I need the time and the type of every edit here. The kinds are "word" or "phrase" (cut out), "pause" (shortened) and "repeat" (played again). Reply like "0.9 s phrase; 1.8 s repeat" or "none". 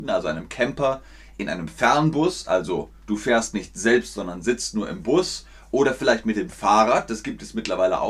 none